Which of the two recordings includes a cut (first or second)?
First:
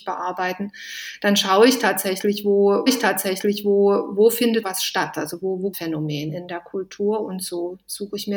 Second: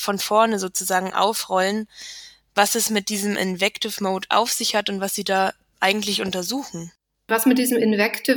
first